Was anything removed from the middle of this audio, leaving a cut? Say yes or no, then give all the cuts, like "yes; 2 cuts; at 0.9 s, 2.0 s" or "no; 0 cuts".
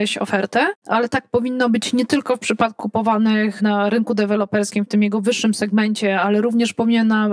yes; 1 cut; at 2.8 s